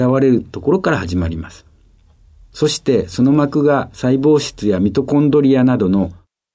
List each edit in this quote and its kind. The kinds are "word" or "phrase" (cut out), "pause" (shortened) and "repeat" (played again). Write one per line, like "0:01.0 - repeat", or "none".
none